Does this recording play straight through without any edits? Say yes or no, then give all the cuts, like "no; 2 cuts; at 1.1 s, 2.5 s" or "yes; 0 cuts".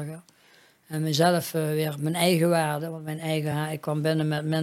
yes; 0 cuts